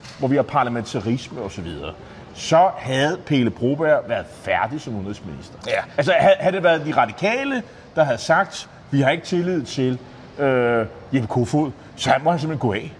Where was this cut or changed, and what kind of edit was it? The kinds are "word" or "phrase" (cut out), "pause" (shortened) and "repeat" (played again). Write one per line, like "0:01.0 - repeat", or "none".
none